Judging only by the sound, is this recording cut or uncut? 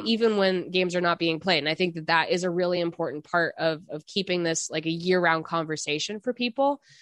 uncut